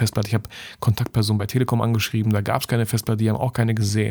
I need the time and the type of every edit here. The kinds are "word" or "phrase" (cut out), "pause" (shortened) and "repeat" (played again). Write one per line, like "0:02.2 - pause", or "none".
none